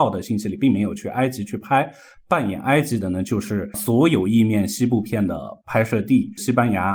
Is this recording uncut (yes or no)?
yes